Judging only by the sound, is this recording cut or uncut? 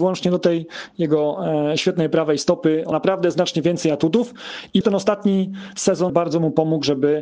cut